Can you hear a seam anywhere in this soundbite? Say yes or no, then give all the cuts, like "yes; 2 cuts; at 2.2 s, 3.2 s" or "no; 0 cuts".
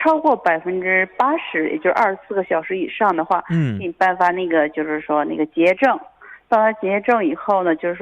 no; 0 cuts